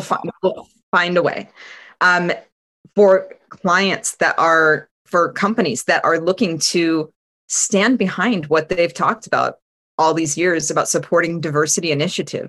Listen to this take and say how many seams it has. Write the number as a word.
zero